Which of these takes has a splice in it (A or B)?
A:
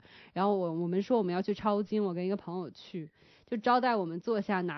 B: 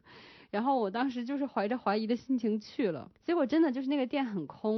B